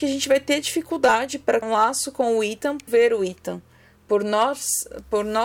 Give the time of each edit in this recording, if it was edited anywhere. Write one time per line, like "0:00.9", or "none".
0:01.6
0:02.9